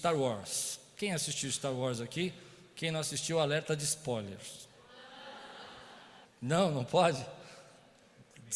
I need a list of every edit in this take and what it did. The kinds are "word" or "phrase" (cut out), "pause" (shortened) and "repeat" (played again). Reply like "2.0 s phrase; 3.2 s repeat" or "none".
6.3 s pause